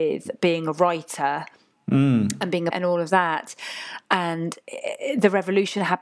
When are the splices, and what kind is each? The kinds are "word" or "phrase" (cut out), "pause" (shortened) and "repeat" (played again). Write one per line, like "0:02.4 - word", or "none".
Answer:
0:02.7 - word